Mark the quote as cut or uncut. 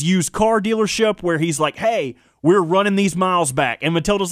uncut